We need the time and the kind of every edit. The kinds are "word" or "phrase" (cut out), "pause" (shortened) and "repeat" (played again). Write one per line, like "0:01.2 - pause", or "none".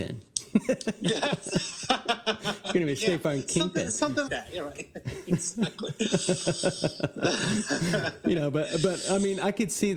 0:04.3 - word

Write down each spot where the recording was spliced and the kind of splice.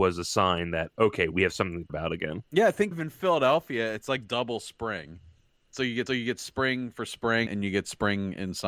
0:01.9 - word
0:02.5 - pause
0:02.9 - word
0:05.4 - pause
0:06.1 - repeat
0:07.5 - word

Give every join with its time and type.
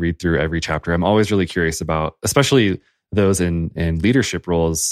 0:03.8 - word

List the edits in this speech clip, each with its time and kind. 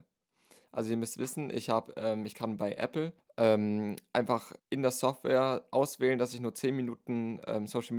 0:03.2 - pause
0:04.6 - pause

